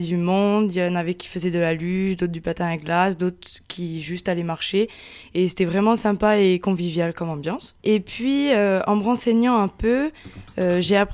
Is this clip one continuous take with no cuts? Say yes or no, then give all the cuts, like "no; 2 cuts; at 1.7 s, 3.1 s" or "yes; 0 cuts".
no; 1 cut; at 7.8 s